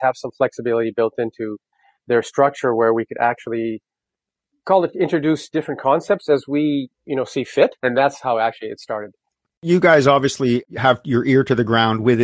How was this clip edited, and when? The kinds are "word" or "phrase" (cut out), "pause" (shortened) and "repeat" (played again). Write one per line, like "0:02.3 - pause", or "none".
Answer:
0:06.9 - pause
0:07.8 - pause